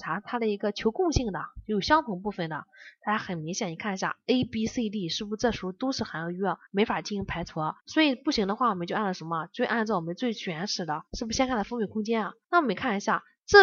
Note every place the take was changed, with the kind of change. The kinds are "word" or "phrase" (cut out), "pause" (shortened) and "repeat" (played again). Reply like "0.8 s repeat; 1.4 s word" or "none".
6.7 s pause; 7.8 s pause; 11.1 s pause; 12.4 s pause